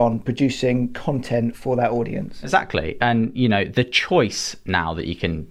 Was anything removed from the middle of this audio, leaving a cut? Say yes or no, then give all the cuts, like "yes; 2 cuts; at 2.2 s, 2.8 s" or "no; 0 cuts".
no; 0 cuts